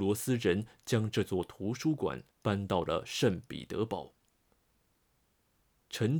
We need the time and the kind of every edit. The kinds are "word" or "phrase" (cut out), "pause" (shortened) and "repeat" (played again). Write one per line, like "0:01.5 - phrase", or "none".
0:02.3 - pause